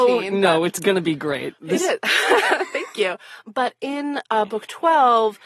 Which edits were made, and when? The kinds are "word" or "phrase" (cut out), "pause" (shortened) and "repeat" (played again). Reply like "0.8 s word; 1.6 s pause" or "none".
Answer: none